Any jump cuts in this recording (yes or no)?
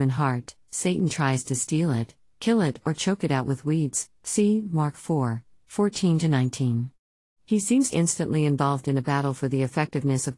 yes